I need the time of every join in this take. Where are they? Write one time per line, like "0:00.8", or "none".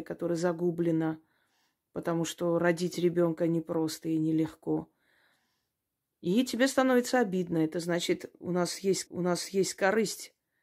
0:09.1